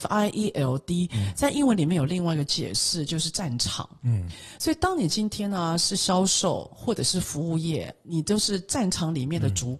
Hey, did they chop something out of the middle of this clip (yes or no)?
no